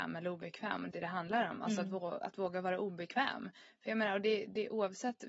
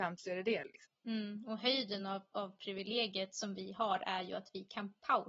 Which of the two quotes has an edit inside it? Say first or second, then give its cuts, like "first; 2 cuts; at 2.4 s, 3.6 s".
first; 1 cut; at 0.9 s